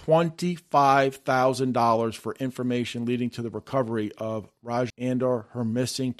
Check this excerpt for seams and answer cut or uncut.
cut